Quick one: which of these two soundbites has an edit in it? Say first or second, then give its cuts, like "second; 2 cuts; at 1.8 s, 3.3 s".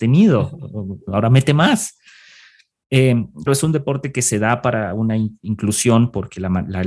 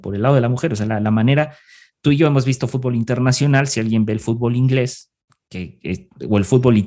first; 1 cut; at 3.5 s